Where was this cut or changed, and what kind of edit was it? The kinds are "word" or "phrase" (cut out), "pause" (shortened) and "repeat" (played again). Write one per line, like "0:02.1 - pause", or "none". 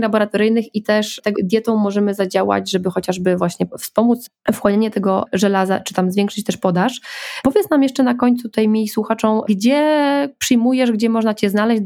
0:01.4 - word